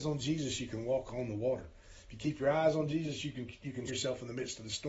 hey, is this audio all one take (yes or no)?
no